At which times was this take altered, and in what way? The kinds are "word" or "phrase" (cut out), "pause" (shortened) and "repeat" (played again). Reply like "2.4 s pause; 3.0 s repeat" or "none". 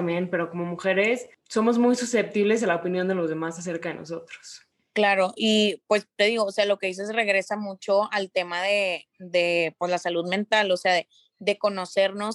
none